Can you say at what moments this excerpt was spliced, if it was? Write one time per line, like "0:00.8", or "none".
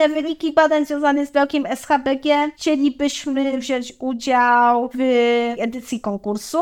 0:05.6